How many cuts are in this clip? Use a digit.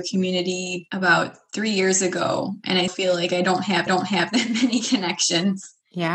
2